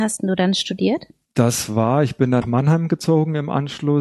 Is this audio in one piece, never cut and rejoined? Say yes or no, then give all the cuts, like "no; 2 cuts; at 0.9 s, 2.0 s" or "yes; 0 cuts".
no; 1 cut; at 2.4 s